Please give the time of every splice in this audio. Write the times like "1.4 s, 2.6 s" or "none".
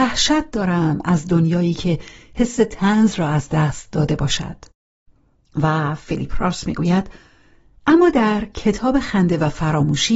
none